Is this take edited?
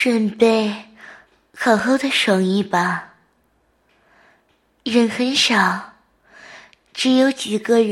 no; 0 cuts

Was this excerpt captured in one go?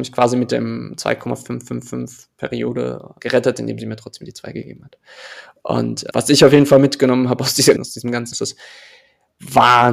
no; 4 cuts; at 3.2 s, 6.1 s, 7.8 s, 8.3 s

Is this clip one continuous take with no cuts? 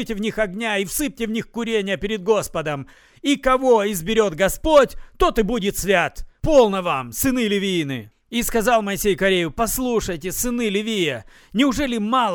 yes; 0 cuts

